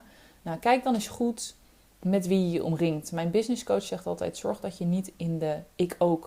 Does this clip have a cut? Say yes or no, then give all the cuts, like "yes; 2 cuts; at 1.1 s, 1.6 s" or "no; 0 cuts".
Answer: no; 0 cuts